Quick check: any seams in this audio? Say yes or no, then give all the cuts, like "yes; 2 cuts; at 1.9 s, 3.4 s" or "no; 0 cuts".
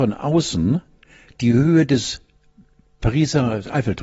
no; 0 cuts